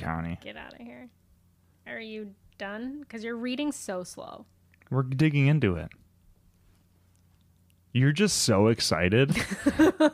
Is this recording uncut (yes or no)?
no